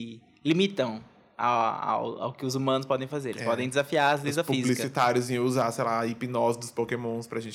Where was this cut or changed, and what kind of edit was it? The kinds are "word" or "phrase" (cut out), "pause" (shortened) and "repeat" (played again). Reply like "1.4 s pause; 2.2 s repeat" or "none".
none